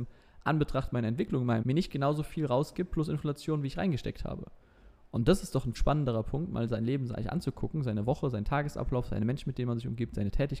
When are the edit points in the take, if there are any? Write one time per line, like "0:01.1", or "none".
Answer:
0:01.6
0:05.7

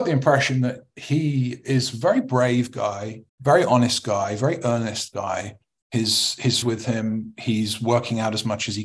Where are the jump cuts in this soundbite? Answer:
0:03.3
0:06.6

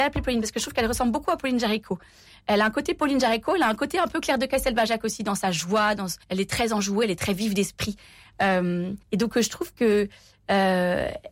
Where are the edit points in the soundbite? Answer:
0:06.2
0:09.0

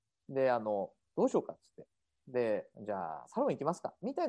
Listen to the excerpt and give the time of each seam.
0:02.7

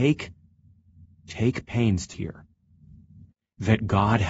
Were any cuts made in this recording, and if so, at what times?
0:02.1

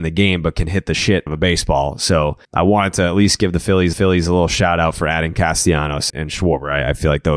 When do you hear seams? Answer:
0:01.3
0:02.4
0:03.9
0:06.1

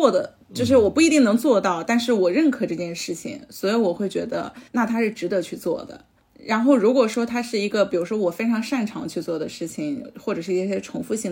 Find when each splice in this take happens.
0:04.7
0:06.2

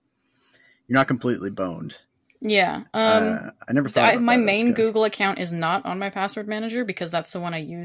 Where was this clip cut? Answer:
none

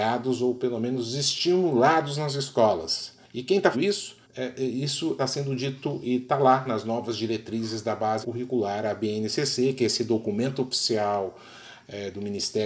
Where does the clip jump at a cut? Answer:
0:03.2
0:03.7
0:04.2
0:05.2
0:06.7
0:08.2

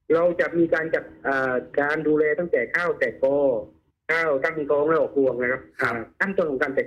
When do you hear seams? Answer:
none

